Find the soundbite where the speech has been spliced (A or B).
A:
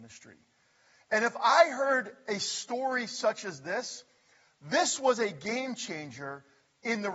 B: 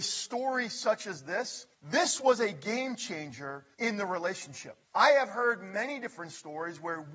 B